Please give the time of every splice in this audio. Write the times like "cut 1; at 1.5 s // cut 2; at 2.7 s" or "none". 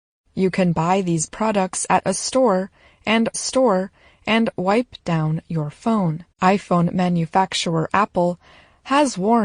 cut 1; at 3.3 s // cut 2; at 6.3 s